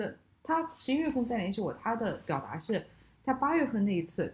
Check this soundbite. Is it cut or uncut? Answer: uncut